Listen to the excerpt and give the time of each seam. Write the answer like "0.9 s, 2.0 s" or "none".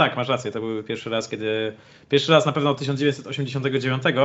none